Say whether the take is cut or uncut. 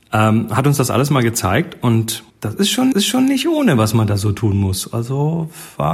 cut